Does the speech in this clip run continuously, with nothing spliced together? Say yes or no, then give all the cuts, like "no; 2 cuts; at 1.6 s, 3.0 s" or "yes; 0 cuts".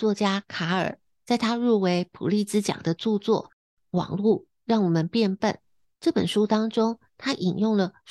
yes; 0 cuts